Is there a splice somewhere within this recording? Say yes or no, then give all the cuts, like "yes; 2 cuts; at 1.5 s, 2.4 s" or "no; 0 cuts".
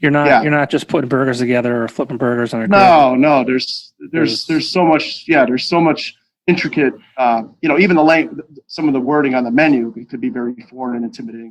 no; 0 cuts